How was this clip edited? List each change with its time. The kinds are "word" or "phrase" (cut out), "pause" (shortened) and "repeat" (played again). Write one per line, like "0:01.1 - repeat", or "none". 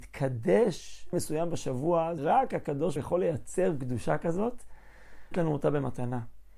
0:01.1 - word
0:02.2 - word
0:03.0 - phrase
0:05.3 - word